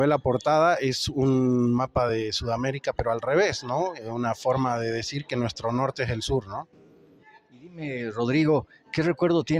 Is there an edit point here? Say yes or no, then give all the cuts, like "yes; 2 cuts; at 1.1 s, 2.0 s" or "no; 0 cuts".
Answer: no; 0 cuts